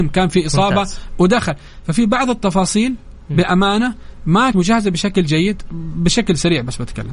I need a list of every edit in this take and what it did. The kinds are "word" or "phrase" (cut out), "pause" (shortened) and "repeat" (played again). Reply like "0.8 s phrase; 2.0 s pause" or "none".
4.5 s word